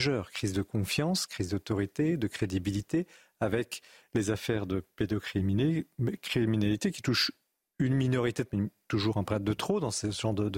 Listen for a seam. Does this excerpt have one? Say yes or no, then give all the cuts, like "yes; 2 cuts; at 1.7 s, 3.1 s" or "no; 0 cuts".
yes; 1 cut; at 8.5 s